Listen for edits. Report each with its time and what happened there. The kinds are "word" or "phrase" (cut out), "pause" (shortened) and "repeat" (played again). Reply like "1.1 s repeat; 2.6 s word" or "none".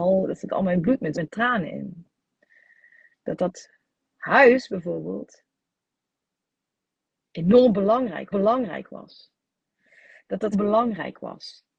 1.1 s word; 8.3 s repeat; 10.5 s phrase

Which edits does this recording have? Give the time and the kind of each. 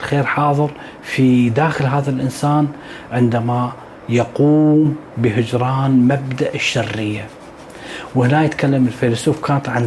none

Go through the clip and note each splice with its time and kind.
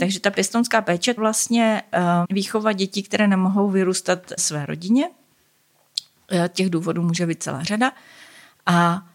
1.2 s word; 2.2 s word; 4.4 s word

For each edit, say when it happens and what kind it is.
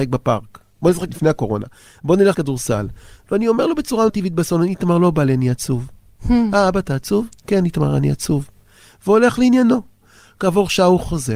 1.1 s word; 2.3 s word; 4.1 s word

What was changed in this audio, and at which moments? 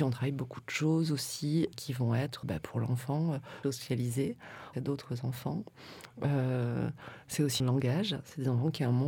1.7 s word; 2.4 s word; 3.6 s word; 4.7 s word; 7.6 s phrase

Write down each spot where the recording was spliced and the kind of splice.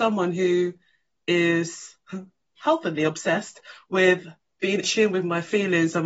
4.8 s word

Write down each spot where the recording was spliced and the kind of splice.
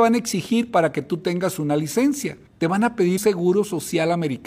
2.5 s pause; 3.2 s word

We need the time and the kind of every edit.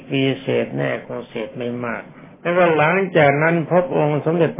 2.3 s pause

